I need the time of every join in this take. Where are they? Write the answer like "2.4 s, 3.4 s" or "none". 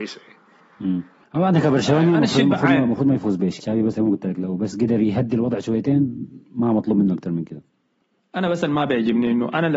1.2 s, 3.6 s, 3.9 s, 7.9 s